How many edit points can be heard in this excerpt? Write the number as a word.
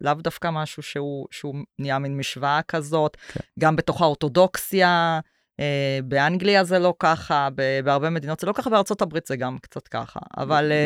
zero